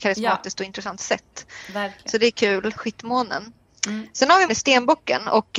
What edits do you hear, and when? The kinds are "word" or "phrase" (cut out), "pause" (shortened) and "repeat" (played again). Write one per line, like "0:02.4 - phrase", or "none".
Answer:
0:02.8 - word
0:04.5 - word

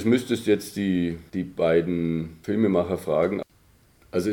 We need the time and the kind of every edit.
none

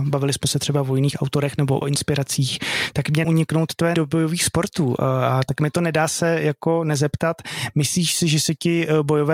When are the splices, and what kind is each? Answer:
0:01.8 - word
0:03.2 - word
0:03.9 - word

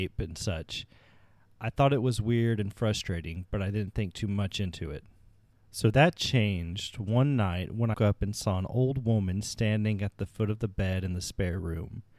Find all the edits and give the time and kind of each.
0:07.9 - word

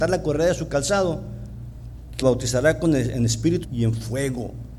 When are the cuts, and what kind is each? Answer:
0:02.2 - word
0:03.6 - word

